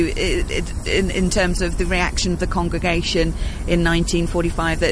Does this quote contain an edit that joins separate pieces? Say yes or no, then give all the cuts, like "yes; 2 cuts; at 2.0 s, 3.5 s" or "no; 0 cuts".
no; 0 cuts